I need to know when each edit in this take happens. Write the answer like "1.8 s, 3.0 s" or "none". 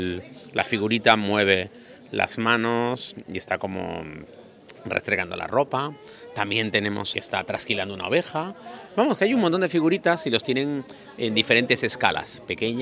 7.1 s